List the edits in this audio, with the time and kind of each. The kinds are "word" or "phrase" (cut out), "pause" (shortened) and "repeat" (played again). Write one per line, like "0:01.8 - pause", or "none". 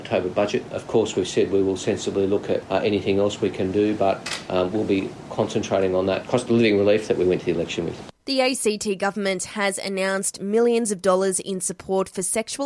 0:08.2 - pause

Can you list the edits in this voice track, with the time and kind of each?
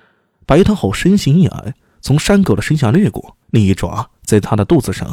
0:03.4 - pause

